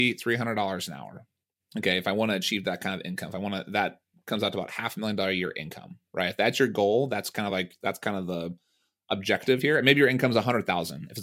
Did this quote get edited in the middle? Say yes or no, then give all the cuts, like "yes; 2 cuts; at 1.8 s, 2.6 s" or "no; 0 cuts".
no; 0 cuts